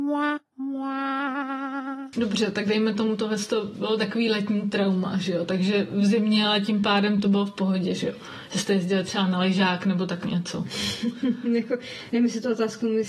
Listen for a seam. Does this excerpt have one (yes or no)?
no